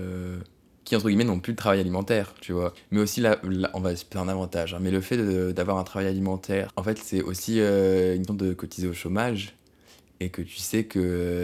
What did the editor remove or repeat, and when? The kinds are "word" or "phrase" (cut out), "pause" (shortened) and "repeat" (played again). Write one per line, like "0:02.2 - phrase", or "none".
0:08.3 - word